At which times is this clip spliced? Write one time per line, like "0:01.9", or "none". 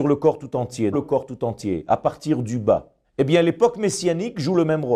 0:00.9
0:03.0